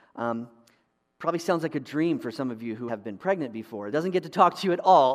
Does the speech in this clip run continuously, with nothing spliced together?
no; 2 cuts; at 2.9 s, 3.9 s

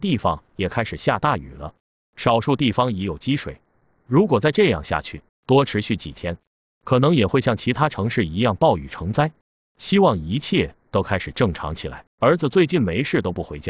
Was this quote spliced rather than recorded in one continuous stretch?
yes; 1 cut; at 12.1 s

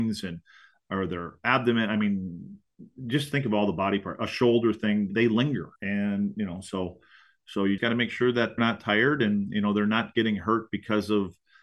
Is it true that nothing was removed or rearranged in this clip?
no; 4 cuts; at 5.1 s, 5.8 s, 7.8 s, 8.6 s

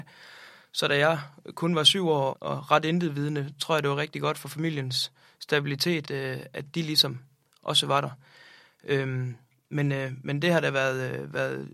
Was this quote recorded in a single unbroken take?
no; 2 cuts; at 2.3 s, 6.0 s

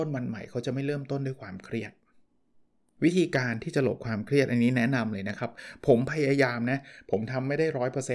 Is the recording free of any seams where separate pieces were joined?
yes; 0 cuts

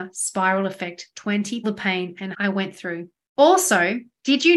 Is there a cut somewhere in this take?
yes; 3 cuts; at 1.1 s, 1.6 s, 2.3 s

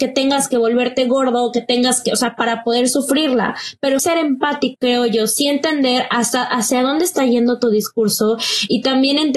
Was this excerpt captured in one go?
no; 3 cuts; at 2.4 s, 4.0 s, 4.7 s

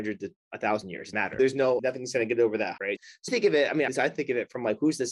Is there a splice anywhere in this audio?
yes; 5 cuts; at 1.1 s, 1.8 s, 2.8 s, 3.3 s, 3.9 s

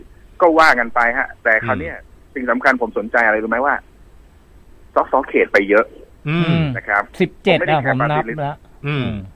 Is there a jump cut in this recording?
no; 0 cuts

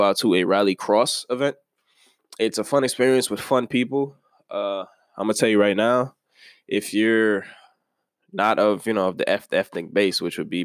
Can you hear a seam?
no; 0 cuts

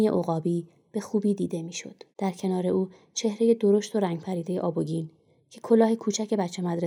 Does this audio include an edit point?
yes; 1 cut; at 2.1 s

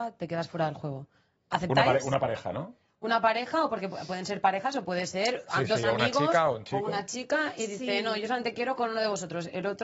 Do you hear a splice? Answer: no; 0 cuts

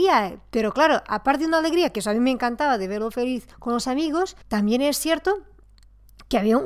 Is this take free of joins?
no; 2 cuts; at 3.5 s, 4.4 s

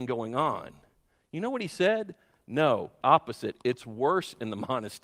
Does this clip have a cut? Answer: yes; 1 cut; at 3.0 s

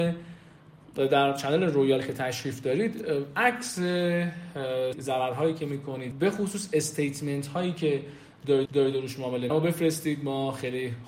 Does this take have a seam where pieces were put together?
yes; 4 cuts; at 4.9 s, 6.1 s, 8.6 s, 9.5 s

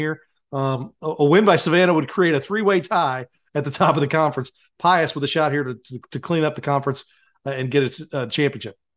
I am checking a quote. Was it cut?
no; 0 cuts

